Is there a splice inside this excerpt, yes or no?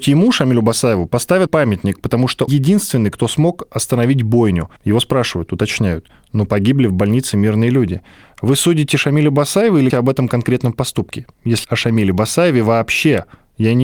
yes